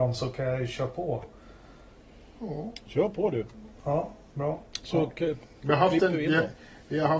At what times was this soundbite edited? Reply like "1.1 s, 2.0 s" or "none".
none